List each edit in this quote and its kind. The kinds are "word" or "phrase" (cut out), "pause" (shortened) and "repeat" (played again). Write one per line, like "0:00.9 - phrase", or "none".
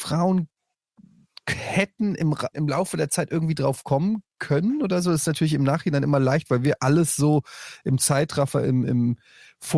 0:02.5 - word